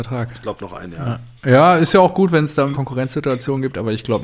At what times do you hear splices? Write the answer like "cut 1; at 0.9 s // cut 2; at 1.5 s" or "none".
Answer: cut 1; at 1.4 s // cut 2; at 2.7 s